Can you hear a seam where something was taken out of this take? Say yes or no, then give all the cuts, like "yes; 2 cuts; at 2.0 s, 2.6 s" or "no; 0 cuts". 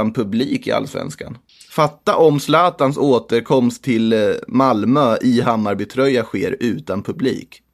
yes; 1 cut; at 1.5 s